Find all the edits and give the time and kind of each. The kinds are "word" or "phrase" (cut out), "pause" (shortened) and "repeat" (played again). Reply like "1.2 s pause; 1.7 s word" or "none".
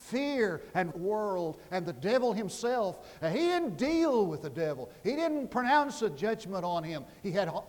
0.9 s phrase

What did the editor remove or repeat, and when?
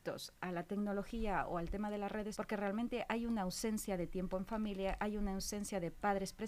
2.3 s word

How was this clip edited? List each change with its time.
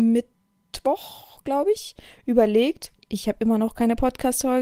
none

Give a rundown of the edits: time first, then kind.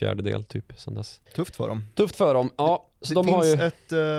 1.3 s pause

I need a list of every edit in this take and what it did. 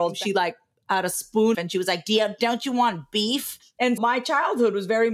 1.5 s phrase; 4.0 s word

